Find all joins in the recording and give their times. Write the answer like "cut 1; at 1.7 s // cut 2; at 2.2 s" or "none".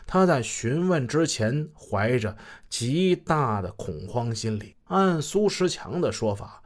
cut 1; at 4.8 s